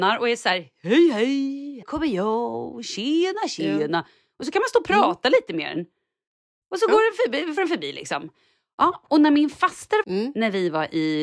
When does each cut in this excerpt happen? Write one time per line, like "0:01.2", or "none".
0:01.8
0:07.6
0:10.0

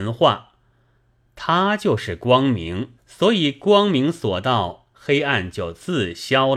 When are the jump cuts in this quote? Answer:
0:03.0

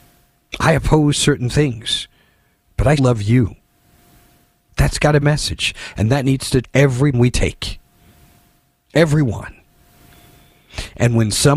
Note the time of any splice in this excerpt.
0:03.0
0:05.2
0:06.6
0:07.1

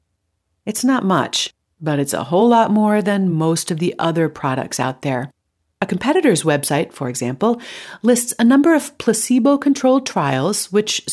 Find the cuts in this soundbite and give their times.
none

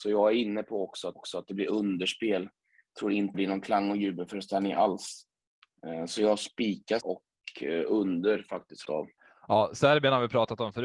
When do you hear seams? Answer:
0:01.2
0:03.3
0:07.0
0:08.8
0:09.2

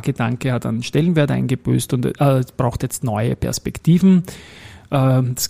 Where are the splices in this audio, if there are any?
none

